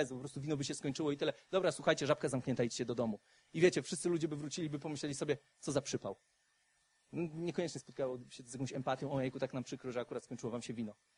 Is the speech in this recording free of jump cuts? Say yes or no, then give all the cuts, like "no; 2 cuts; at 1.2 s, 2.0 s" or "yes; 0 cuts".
yes; 0 cuts